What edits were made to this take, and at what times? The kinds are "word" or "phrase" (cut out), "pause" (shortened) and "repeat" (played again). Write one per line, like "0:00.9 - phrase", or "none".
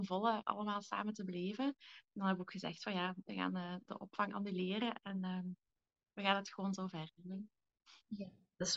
none